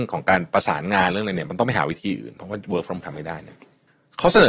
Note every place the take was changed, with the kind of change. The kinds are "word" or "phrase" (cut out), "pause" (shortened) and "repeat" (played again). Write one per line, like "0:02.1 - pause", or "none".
0:03.0 - word